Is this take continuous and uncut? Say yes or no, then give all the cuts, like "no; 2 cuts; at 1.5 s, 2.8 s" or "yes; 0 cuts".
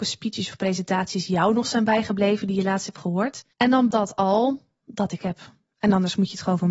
no; 3 cuts; at 3.5 s, 3.9 s, 5.2 s